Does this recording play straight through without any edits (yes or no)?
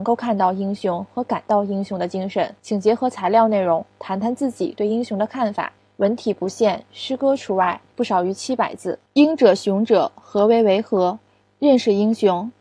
no